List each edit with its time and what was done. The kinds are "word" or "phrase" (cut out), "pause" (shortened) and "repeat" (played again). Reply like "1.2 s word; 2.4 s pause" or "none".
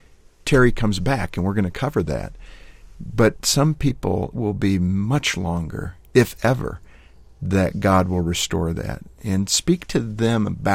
4.3 s word